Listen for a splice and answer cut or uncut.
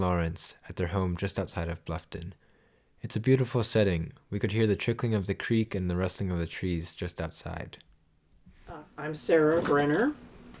uncut